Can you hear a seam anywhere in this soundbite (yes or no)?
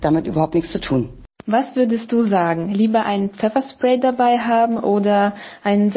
no